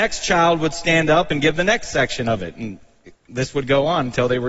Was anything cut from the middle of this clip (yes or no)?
yes